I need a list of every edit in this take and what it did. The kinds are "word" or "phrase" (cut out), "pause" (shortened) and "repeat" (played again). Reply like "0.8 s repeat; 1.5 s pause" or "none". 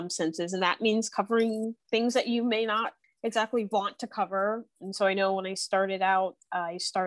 none